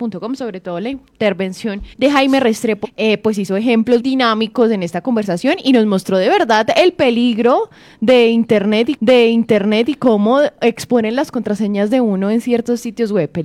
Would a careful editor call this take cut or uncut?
cut